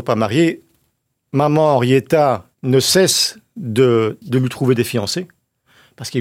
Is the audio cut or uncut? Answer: cut